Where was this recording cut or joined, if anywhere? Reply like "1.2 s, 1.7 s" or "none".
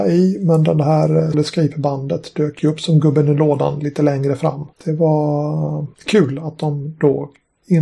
1.3 s, 4.7 s, 5.9 s